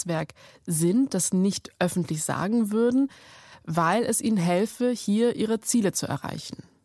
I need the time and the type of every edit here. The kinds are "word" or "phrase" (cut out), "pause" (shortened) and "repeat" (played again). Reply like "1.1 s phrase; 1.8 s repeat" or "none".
none